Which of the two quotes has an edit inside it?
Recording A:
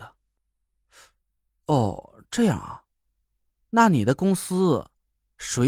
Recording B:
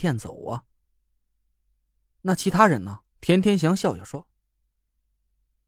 B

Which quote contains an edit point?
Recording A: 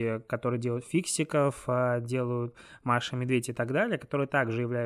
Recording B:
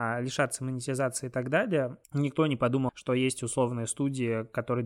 B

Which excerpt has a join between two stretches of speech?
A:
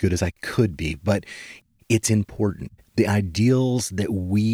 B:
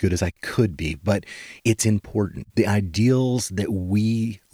B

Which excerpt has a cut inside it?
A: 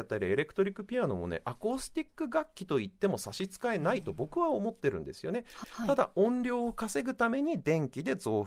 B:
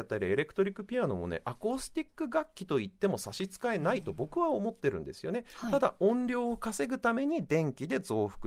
A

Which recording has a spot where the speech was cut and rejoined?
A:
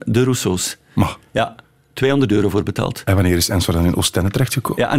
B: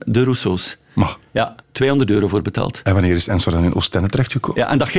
B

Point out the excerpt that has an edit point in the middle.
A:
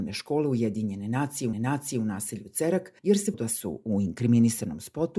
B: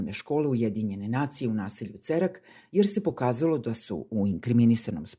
A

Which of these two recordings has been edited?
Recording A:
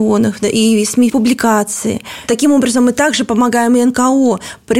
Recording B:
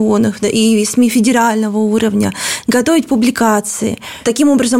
A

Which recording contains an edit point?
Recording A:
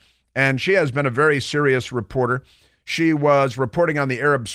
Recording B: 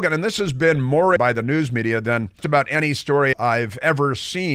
B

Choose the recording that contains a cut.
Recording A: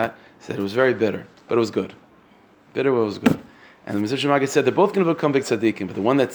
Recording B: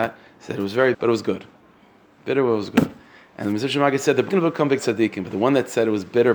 B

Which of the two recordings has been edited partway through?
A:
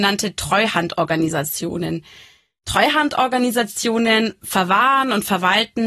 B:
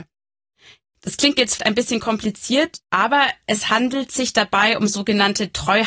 B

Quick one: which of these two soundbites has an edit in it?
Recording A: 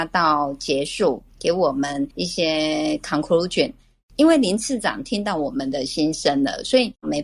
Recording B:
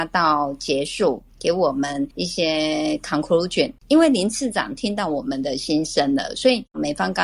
B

